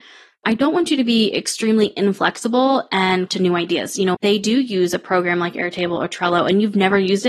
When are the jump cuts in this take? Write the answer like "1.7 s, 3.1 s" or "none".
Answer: 3.3 s, 4.1 s